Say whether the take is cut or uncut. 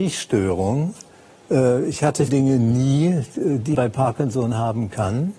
cut